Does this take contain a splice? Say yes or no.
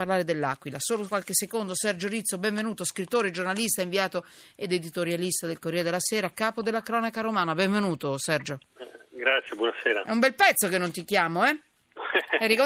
no